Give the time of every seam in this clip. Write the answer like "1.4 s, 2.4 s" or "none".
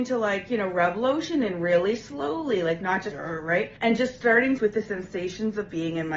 3.1 s, 3.8 s, 4.6 s